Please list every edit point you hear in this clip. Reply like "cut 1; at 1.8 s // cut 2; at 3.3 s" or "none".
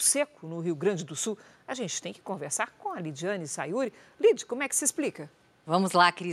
none